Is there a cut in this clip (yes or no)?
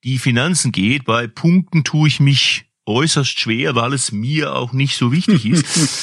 yes